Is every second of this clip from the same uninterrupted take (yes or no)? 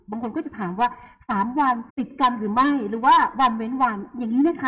no